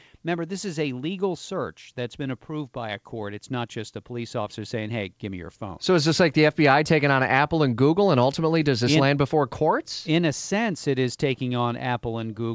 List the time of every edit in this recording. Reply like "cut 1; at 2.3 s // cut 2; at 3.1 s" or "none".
none